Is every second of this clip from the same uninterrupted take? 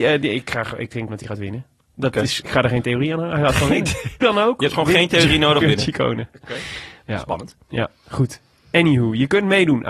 no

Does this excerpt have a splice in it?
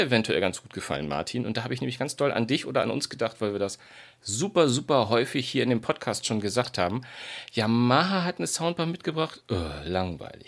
no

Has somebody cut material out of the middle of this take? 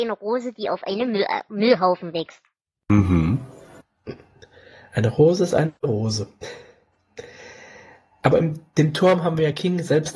no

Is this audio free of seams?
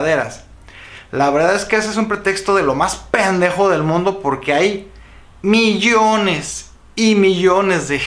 yes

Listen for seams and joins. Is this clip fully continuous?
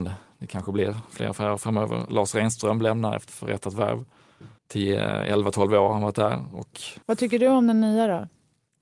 no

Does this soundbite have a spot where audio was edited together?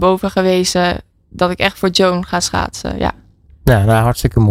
no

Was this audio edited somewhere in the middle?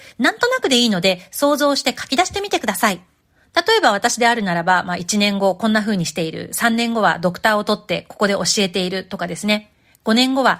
no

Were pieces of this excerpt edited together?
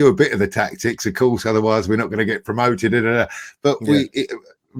no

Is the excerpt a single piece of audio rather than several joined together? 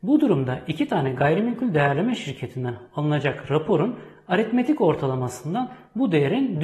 yes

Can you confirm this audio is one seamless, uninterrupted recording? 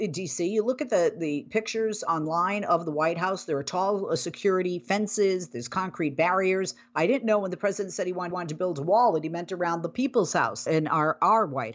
no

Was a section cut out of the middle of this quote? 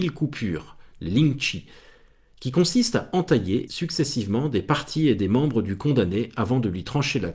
yes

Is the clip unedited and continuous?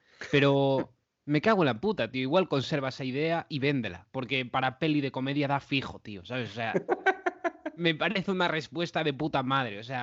yes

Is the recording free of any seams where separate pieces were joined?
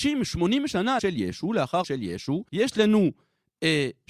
no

